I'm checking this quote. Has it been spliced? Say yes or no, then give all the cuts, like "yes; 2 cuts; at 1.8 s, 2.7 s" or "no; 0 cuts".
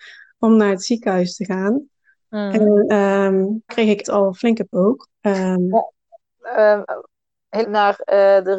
yes; 5 cuts; at 3.7 s, 4.0 s, 4.7 s, 5.1 s, 7.6 s